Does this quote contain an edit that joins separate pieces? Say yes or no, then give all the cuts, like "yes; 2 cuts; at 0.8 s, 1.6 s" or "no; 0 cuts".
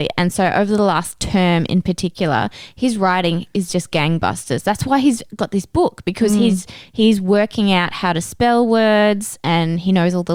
no; 0 cuts